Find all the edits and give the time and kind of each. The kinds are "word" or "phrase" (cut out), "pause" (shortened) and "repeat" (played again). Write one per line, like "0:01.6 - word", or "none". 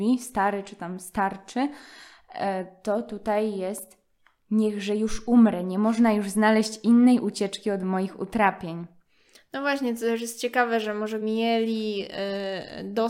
0:11.2 - word